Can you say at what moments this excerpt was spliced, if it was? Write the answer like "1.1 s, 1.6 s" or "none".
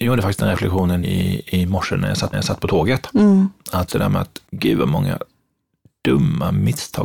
1.0 s, 2.3 s, 3.9 s, 4.5 s